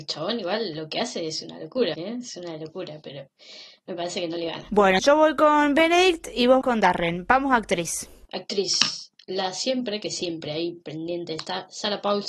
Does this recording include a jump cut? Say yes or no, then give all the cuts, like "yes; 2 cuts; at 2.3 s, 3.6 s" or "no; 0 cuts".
yes; 3 cuts; at 1.9 s, 5.0 s, 6.6 s